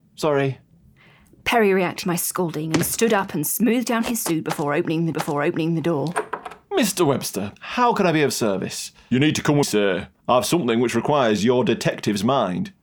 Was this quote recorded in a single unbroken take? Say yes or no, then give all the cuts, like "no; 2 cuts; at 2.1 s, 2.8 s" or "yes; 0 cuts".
no; 4 cuts; at 2.0 s, 5.1 s, 7.6 s, 9.6 s